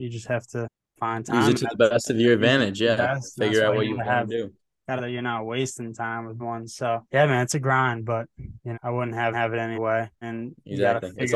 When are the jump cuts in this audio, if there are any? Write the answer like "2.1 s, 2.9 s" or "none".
5.0 s, 6.4 s, 7.1 s, 8.7 s, 9.3 s, 9.7 s, 10.2 s